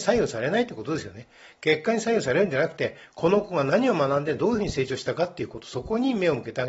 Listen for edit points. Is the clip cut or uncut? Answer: uncut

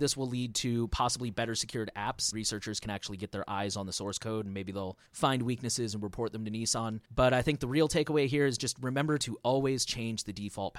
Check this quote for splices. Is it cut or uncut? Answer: cut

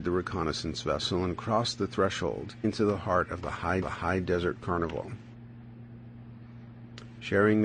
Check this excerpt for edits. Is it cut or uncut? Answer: cut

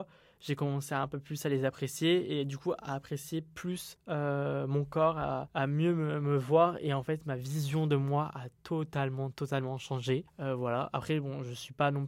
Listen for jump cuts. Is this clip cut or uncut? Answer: uncut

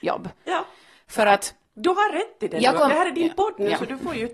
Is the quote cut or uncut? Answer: uncut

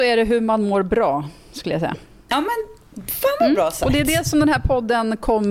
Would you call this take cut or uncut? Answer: uncut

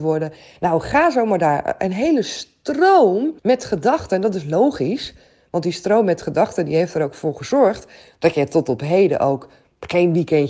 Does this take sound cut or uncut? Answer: cut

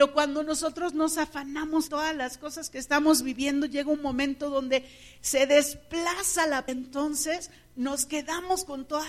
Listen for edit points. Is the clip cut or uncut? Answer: cut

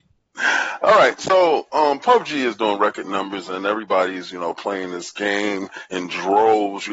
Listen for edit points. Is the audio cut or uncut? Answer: uncut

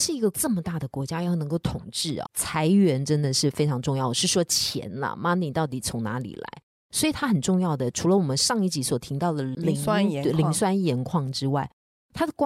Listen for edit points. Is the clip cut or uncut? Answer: cut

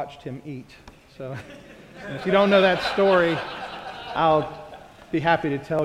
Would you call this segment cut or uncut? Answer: uncut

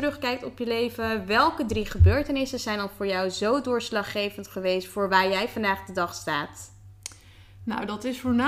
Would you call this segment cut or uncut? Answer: uncut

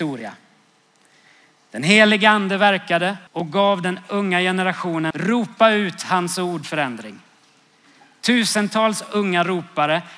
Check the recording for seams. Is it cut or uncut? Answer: cut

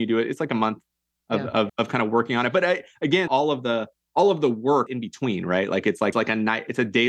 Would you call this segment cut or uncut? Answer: cut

